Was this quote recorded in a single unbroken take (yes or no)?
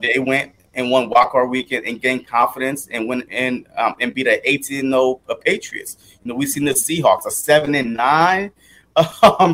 yes